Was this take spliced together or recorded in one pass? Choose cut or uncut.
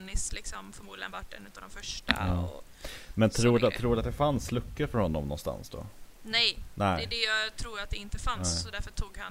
uncut